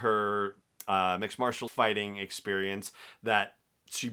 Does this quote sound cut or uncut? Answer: cut